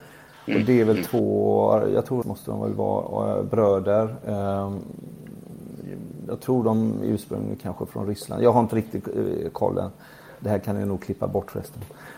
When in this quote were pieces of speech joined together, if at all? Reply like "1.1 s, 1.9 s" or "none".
2.2 s